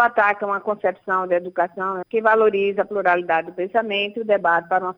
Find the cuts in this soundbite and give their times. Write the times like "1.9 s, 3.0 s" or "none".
2.0 s